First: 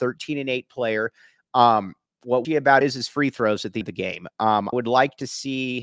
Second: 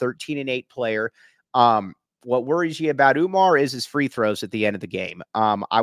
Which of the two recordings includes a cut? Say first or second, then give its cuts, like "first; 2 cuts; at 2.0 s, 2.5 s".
first; 4 cuts; at 2.4 s, 2.8 s, 3.8 s, 4.7 s